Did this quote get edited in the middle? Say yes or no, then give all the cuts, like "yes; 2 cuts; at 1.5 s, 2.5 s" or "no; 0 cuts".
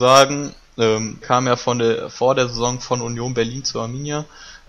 yes; 1 cut; at 1.2 s